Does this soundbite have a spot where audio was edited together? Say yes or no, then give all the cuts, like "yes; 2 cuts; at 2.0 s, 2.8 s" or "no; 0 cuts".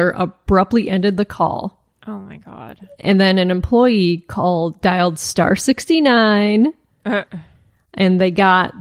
no; 0 cuts